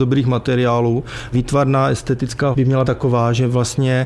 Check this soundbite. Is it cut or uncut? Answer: cut